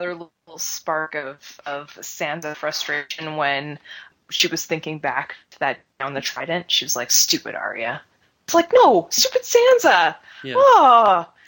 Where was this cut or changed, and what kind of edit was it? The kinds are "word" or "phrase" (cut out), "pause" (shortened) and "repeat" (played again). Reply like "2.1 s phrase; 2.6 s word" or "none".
none